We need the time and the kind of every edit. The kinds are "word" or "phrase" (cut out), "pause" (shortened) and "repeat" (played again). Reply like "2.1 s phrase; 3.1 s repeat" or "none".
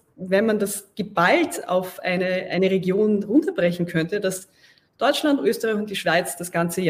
none